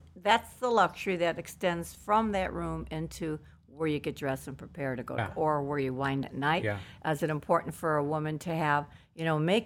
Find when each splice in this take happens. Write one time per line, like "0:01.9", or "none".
0:05.2
0:06.2